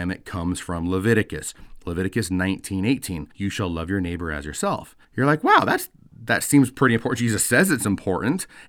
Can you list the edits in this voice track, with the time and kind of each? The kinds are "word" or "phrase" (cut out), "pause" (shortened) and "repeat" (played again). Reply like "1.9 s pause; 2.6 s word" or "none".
3.3 s pause; 5.0 s pause